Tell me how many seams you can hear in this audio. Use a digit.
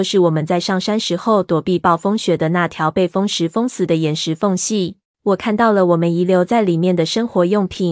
1